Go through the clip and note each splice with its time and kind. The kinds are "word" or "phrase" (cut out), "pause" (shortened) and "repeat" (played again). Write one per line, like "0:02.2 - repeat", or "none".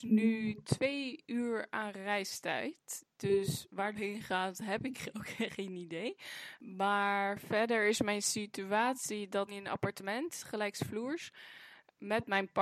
0:03.9 - phrase
0:09.5 - phrase